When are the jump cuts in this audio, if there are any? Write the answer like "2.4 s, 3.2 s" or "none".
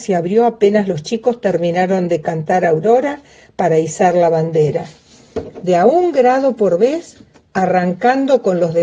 none